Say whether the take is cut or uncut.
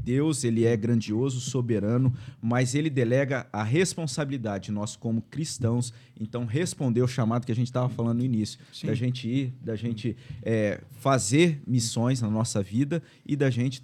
uncut